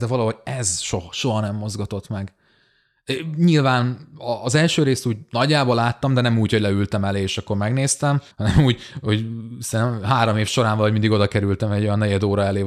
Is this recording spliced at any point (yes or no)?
yes